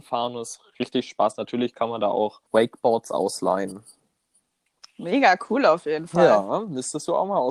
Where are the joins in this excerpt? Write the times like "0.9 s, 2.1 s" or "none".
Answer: 2.5 s

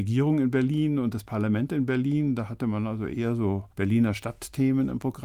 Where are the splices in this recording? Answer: 3.7 s

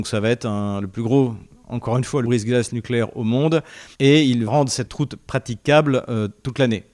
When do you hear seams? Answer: 2.2 s, 3.9 s, 4.5 s

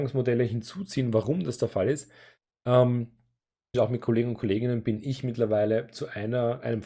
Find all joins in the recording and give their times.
3.7 s

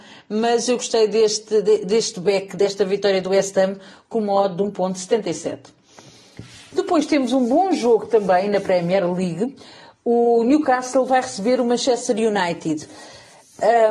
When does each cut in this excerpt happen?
none

